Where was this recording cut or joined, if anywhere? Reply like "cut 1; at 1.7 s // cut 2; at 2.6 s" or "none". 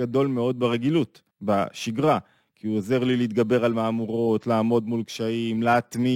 cut 1; at 1.3 s